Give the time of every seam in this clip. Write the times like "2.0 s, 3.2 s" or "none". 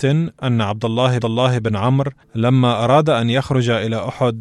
1.2 s, 2.2 s